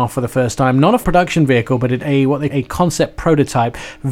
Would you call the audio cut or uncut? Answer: cut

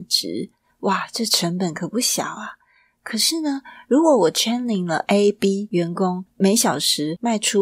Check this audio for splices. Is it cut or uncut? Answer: uncut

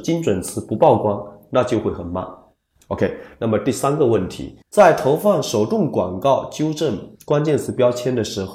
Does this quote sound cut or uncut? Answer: cut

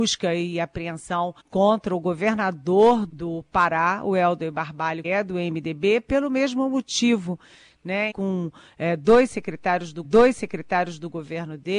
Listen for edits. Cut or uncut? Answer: cut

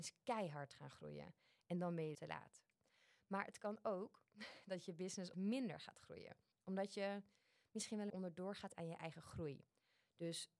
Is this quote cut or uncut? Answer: cut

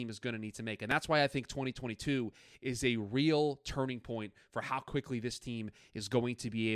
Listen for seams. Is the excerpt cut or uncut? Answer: uncut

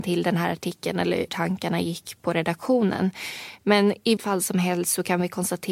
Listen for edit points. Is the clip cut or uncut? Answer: cut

